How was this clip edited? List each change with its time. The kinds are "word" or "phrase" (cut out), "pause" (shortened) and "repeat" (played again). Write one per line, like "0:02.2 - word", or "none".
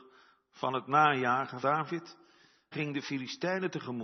0:01.6 - word
0:02.7 - word